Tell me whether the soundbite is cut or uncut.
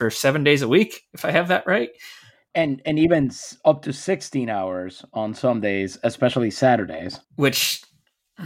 cut